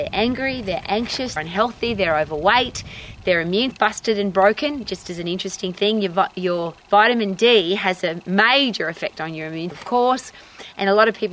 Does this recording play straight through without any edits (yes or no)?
no